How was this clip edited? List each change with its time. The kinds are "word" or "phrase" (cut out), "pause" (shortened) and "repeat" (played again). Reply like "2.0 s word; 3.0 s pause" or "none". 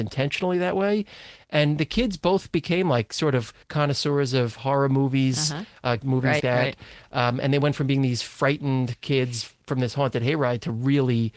3.6 s pause; 6.0 s phrase; 6.4 s word